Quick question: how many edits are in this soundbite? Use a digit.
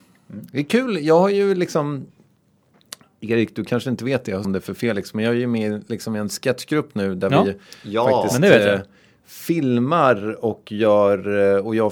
1